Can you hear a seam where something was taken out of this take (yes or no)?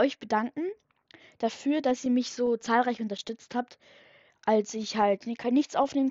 no